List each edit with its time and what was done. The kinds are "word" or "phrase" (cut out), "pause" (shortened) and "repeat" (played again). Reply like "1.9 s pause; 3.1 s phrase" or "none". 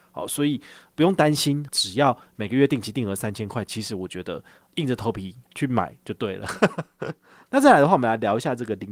1.7 s word; 7.5 s word